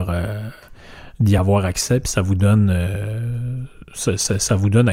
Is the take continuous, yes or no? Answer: yes